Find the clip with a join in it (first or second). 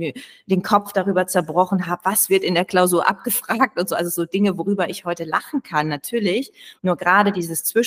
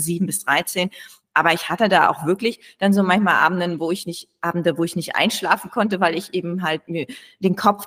first